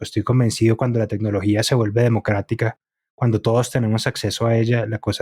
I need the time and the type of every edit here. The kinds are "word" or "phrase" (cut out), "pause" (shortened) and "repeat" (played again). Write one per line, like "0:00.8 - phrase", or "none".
none